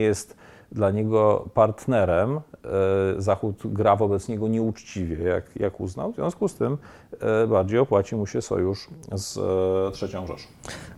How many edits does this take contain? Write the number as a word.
zero